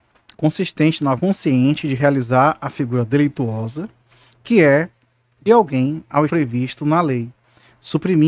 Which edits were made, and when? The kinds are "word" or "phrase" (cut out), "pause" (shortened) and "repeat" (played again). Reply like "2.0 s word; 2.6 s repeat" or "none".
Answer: 1.2 s word; 5.5 s word; 6.3 s word